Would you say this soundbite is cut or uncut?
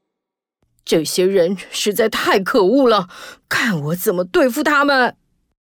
cut